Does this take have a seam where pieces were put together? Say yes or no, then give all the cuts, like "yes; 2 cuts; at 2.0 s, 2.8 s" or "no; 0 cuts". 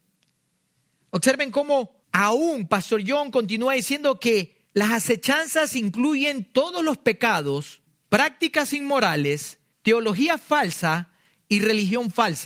yes; 4 cuts; at 2.0 s, 4.7 s, 7.9 s, 9.7 s